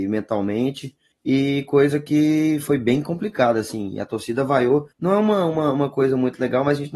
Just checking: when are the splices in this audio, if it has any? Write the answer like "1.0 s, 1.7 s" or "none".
1.1 s, 4.9 s